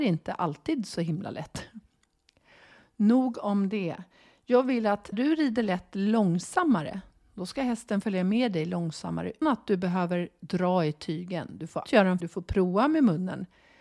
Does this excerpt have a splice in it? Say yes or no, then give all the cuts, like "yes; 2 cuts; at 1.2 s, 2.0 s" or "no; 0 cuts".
yes; 4 cuts; at 5.1 s, 9.4 s, 11.9 s, 12.2 s